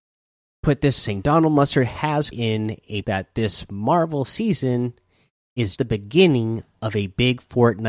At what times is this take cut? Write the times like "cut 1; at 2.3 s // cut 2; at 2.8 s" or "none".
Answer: cut 1; at 1.0 s // cut 2; at 2.3 s // cut 3; at 3.0 s // cut 4; at 5.8 s

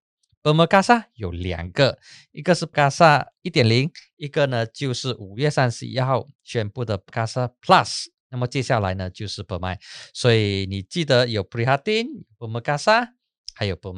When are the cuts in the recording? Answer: cut 1; at 2.7 s // cut 2; at 7.1 s

